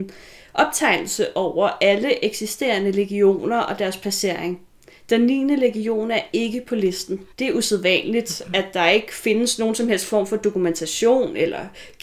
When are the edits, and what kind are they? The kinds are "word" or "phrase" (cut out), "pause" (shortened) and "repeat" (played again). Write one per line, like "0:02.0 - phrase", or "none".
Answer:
0:07.3 - pause

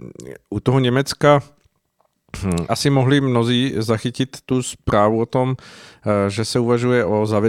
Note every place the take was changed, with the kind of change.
0:02.7 - word

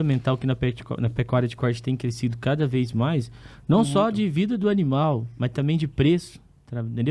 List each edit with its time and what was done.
none

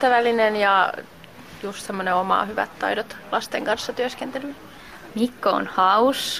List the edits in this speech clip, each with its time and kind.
none

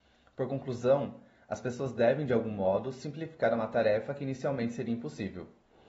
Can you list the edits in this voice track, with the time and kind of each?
none

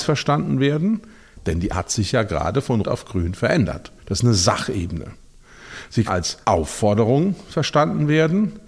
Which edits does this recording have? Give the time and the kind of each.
0:01.7 - word
0:02.8 - word
0:04.0 - pause
0:06.1 - word
0:06.4 - pause

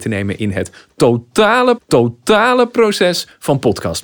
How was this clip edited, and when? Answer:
0:01.8 - repeat

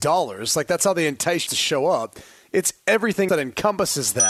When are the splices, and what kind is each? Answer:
0:01.5 - word
0:03.3 - word

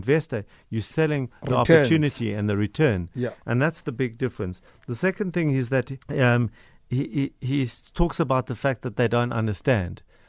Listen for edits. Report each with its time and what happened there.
0:06.0 - pause

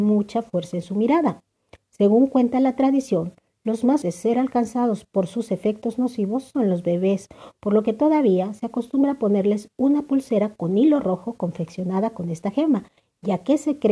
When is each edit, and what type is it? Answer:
0:04.0 - word

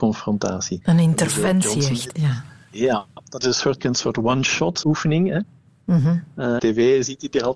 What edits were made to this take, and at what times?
0:02.1 - phrase
0:03.4 - word
0:03.8 - word
0:04.8 - word
0:06.6 - phrase

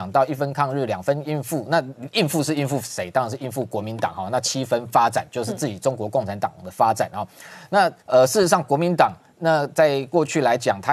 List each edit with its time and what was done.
0:08.0 - pause

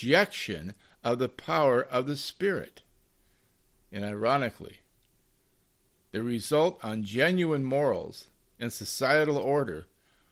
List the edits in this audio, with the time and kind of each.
none

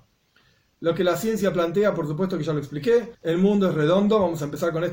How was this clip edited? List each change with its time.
0:03.1 - pause

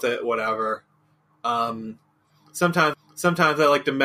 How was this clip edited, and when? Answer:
0:02.9 - repeat

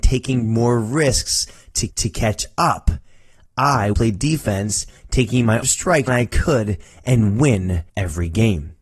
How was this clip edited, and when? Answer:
0:01.9 - repeat
0:03.9 - word
0:05.6 - word
0:06.1 - word
0:07.9 - pause

